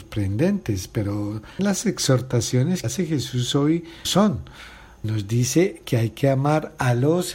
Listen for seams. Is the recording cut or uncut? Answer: cut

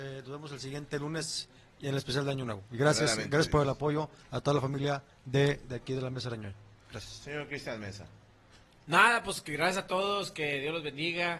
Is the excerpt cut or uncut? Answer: uncut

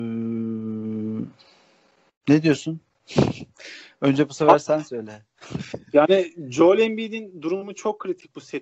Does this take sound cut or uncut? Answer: uncut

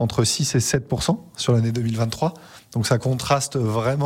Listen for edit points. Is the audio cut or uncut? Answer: uncut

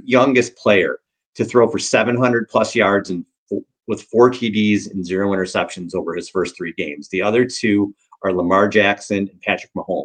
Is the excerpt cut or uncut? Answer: uncut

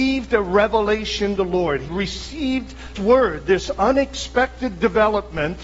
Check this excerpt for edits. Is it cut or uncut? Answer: cut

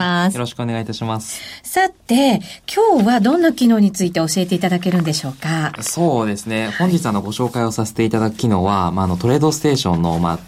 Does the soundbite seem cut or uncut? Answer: uncut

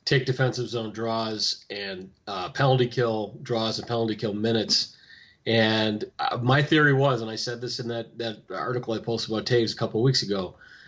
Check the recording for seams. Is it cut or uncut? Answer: cut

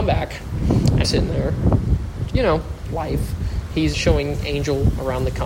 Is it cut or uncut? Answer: cut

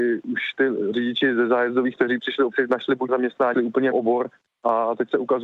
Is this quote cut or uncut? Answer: cut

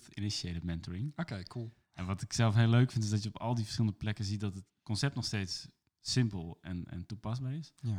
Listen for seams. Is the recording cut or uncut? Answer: uncut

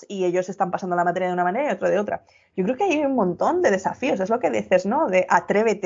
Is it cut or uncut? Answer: uncut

